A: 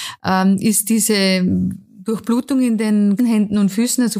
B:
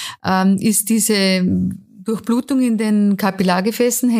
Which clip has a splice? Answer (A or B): A